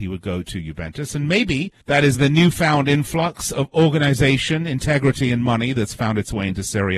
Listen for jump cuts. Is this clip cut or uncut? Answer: cut